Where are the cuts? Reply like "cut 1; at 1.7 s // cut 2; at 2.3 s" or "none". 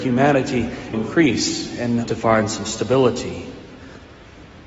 cut 1; at 0.9 s // cut 2; at 2.0 s